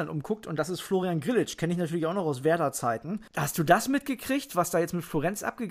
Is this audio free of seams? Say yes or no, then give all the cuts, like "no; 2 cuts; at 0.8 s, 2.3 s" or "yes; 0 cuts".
yes; 0 cuts